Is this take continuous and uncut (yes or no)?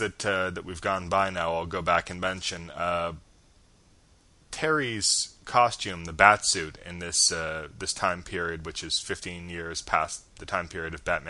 yes